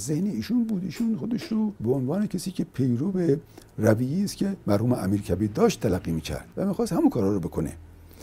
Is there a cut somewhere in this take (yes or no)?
yes